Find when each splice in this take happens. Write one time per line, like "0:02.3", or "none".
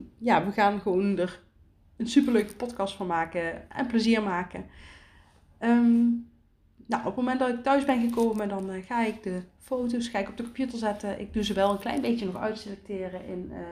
none